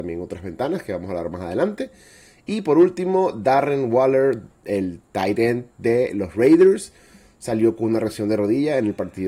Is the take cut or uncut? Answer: uncut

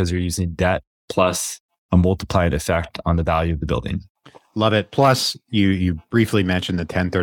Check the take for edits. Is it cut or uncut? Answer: uncut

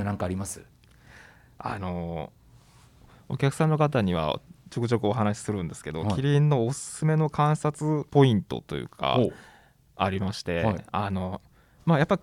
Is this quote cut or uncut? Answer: uncut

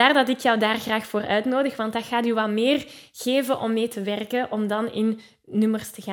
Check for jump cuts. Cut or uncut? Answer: uncut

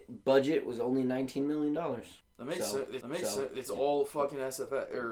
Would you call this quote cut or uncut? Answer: cut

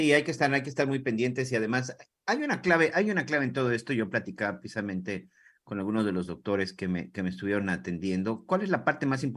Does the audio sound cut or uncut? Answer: uncut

